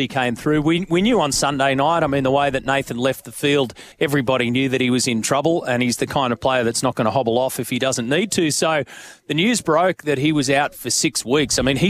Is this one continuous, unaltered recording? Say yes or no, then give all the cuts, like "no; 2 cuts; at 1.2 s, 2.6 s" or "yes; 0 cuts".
no; 1 cut; at 3.9 s